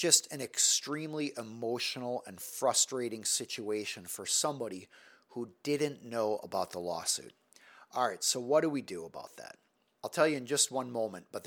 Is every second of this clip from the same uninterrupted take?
yes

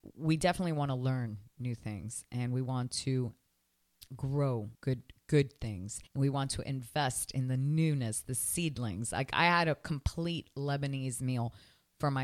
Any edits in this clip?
yes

